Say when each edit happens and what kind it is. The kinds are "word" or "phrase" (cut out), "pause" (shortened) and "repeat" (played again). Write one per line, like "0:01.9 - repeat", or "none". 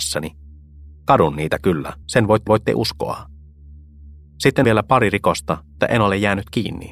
0:02.0 - pause
0:02.5 - repeat
0:04.6 - word
0:05.8 - word